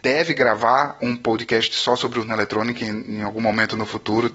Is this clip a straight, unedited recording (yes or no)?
yes